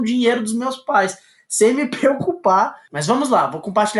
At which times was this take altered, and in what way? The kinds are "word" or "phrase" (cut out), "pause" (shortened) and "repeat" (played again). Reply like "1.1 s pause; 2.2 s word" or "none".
none